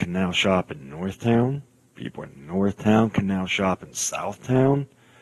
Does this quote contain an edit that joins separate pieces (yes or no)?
no